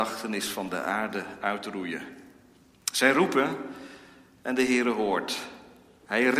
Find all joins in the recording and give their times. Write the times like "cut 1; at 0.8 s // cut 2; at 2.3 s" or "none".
none

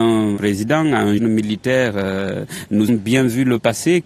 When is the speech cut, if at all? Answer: cut 1; at 1.2 s // cut 2; at 2.9 s

